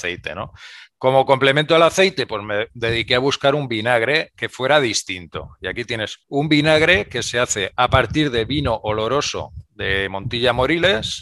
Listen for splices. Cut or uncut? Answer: cut